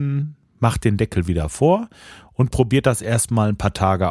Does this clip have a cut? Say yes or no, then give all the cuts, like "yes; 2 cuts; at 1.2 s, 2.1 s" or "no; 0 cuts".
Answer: no; 0 cuts